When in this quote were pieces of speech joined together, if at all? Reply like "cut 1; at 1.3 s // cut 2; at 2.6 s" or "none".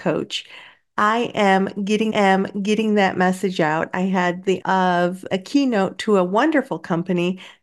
cut 1; at 2.1 s // cut 2; at 4.6 s // cut 3; at 5.3 s